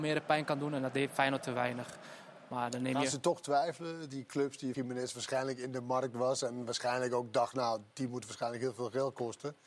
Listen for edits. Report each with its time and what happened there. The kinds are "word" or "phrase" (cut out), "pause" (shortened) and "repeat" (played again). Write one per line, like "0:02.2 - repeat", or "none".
0:01.4 - word
0:04.7 - word

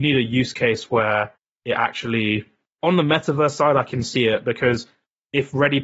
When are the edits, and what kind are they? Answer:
0:02.8 - word

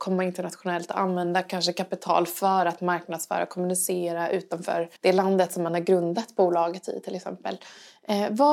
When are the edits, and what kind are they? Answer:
0:05.0 - pause

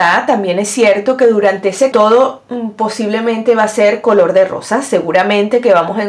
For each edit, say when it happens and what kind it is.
0:01.9 - phrase

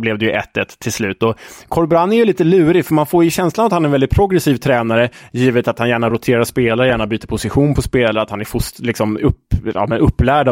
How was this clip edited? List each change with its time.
none

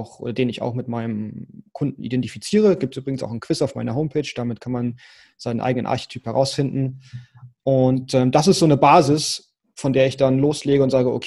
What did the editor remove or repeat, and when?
none

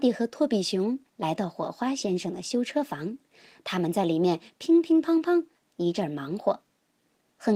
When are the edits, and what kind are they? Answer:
none

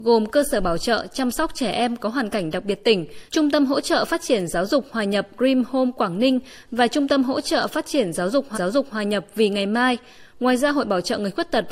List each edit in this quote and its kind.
0:03.3 - pause
0:08.5 - repeat

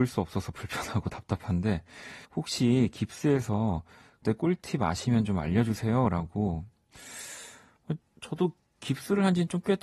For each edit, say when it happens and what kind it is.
0:02.2 - pause
0:04.2 - word
0:08.0 - pause

